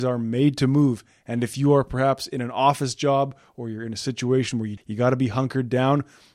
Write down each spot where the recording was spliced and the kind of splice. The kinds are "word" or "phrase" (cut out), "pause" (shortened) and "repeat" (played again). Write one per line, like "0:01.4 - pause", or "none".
0:04.8 - word